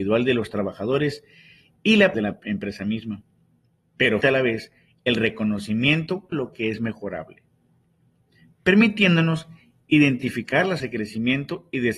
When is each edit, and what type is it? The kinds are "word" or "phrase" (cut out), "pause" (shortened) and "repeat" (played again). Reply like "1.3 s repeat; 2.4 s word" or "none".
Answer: 2.1 s word; 4.2 s word; 6.3 s word; 10.8 s word